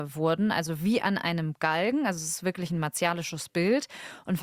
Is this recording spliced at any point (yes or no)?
no